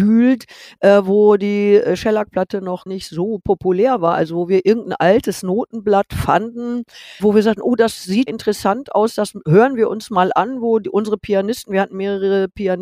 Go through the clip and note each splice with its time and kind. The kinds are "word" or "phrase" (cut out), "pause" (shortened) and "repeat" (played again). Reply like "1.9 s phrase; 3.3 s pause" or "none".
2.9 s word; 7.2 s word; 8.3 s word